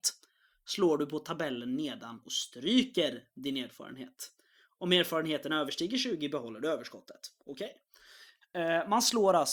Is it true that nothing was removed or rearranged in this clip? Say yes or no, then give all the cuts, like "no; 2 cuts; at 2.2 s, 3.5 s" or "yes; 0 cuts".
yes; 0 cuts